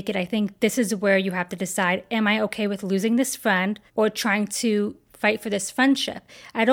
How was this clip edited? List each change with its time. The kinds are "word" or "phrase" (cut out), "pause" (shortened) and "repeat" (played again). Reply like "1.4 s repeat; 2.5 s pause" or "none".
3.9 s pause